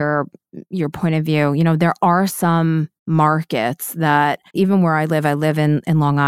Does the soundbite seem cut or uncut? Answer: cut